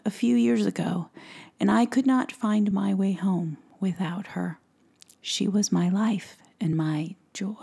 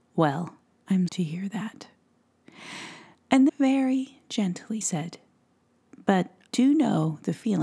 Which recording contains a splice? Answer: second; 4 cuts; at 1.1 s, 3.5 s, 4.8 s, 6.5 s

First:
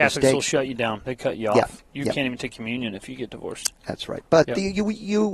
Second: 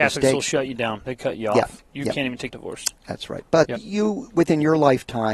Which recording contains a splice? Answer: second; 2 cuts; at 2.5 s, 3.8 s

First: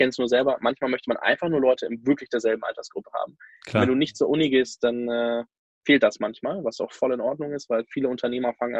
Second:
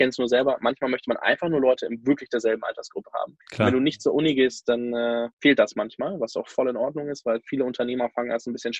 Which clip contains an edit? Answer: second; 2 cuts; at 3.4 s, 5.3 s

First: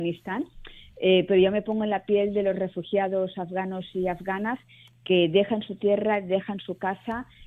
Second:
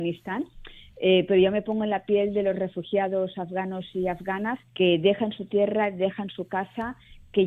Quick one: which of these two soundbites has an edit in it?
second; 1 cut; at 4.7 s

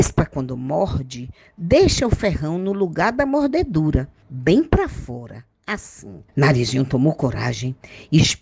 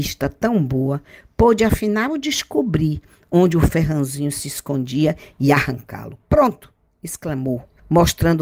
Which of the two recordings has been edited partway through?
first; 1 cut; at 6.3 s

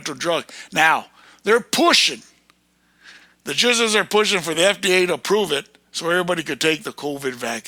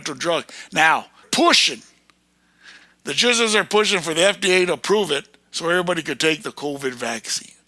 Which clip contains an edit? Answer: second; 1 cut; at 1.2 s

